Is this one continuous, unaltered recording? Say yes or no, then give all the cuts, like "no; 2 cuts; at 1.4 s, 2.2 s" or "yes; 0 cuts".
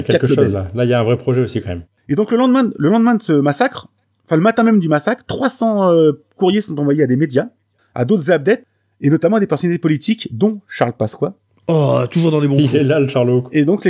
yes; 0 cuts